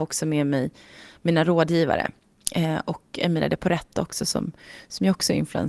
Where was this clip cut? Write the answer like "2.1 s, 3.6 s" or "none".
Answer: none